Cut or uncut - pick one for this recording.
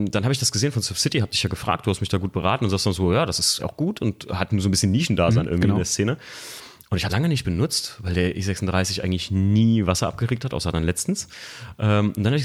cut